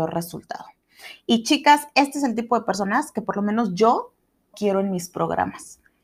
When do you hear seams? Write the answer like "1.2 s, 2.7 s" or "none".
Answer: 4.5 s